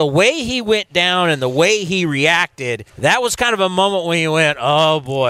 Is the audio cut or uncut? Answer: cut